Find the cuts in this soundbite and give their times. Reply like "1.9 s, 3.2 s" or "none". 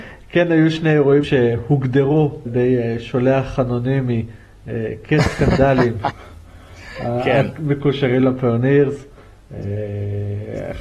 1.2 s, 2.4 s